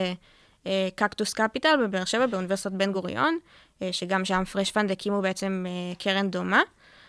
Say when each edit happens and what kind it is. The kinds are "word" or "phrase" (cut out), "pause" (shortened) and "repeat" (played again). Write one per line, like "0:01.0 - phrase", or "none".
none